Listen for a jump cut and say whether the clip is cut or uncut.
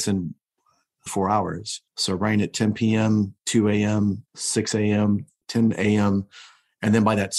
cut